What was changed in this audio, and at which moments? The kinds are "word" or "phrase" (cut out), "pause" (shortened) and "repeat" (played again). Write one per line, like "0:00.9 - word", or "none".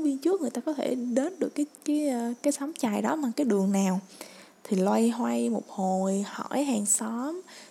none